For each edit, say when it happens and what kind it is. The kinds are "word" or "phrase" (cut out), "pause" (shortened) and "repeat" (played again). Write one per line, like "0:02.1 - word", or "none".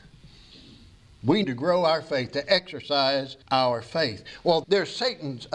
0:01.4 - word
0:03.4 - pause
0:04.6 - word